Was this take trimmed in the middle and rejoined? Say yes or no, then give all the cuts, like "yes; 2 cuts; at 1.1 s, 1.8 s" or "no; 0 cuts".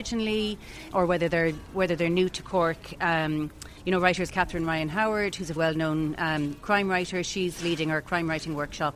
yes; 3 cuts; at 0.9 s, 4.3 s, 5.6 s